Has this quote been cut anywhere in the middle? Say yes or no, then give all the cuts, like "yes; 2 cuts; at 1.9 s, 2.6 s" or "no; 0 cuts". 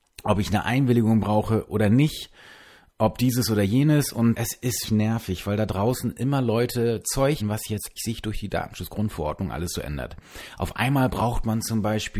yes; 4 cuts; at 4.3 s, 4.8 s, 7.4 s, 8.0 s